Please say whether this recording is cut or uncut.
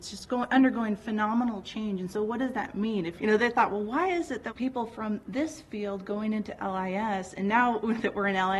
cut